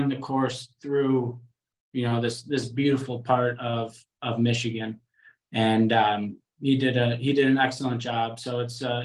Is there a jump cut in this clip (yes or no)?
no